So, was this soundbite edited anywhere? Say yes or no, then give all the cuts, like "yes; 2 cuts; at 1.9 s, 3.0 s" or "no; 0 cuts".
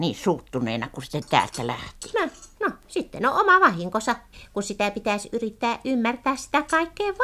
yes; 2 cuts; at 2.8 s, 4.3 s